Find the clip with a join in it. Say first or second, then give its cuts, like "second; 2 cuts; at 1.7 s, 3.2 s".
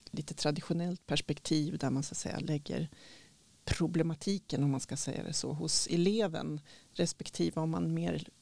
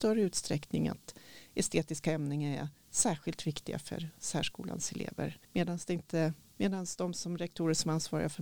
second; 1 cut; at 5.4 s